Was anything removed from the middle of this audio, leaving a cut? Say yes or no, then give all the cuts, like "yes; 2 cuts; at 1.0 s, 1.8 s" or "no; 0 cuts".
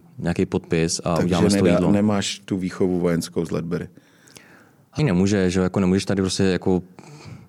yes; 1 cut; at 5.0 s